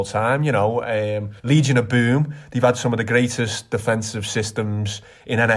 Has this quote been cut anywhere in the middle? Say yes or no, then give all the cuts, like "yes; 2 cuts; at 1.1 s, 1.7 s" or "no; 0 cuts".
yes; 1 cut; at 1.4 s